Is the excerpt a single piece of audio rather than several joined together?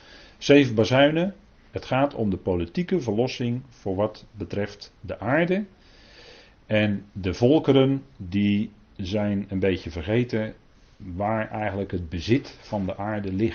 yes; 0 cuts

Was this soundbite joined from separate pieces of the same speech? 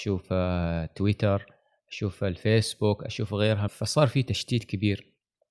yes; 1 cut; at 3.7 s

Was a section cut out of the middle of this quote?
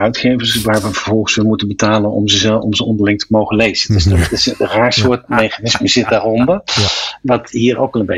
no; 0 cuts

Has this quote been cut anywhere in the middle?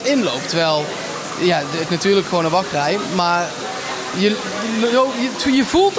yes; 1 cut; at 1.9 s

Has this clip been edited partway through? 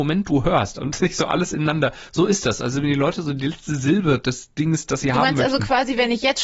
no; 0 cuts

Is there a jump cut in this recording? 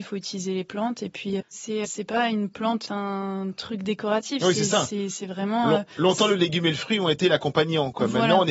yes; 3 cuts; at 1.4 s, 1.8 s, 2.9 s

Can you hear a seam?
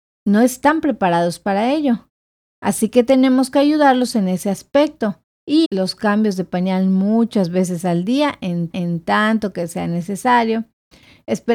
yes; 2 cuts; at 5.6 s, 8.7 s

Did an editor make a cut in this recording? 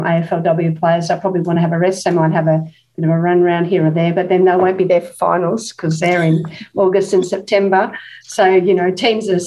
no; 0 cuts

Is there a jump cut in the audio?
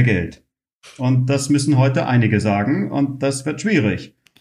no; 0 cuts

